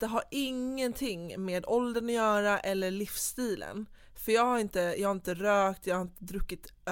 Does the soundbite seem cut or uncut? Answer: uncut